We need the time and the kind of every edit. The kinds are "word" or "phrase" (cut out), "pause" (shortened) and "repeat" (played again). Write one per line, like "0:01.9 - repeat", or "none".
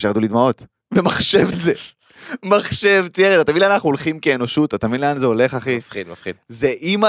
0:01.5 - word